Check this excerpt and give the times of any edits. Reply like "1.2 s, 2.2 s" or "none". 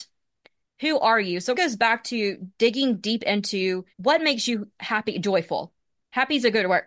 1.5 s, 3.9 s